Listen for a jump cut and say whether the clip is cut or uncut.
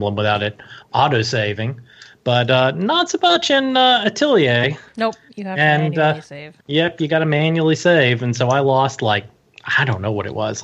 cut